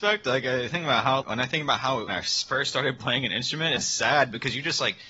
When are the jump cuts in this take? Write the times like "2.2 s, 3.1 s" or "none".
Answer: 1.2 s, 2.1 s, 3.8 s